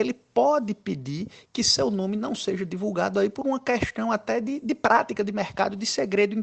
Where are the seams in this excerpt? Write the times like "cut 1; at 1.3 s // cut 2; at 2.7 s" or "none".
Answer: none